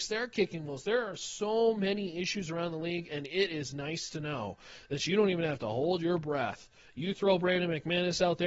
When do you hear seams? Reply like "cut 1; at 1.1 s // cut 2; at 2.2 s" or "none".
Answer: none

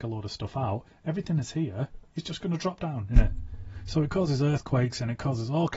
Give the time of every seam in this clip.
none

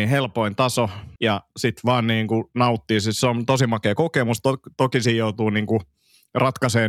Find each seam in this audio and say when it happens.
cut 1; at 1.2 s

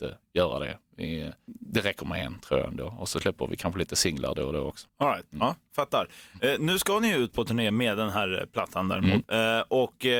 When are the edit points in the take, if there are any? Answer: none

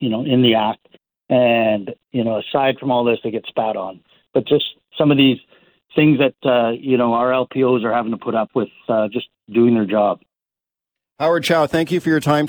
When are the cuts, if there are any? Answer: none

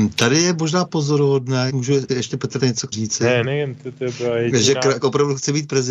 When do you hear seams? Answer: cut 1; at 1.7 s // cut 2; at 2.1 s // cut 3; at 2.6 s // cut 4; at 2.9 s // cut 5; at 3.4 s // cut 6; at 5.0 s

